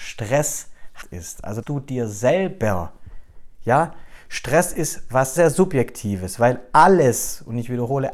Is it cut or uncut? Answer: cut